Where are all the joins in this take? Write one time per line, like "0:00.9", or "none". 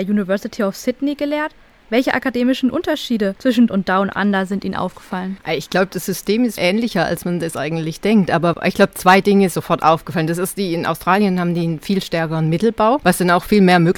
0:03.7
0:06.6
0:09.5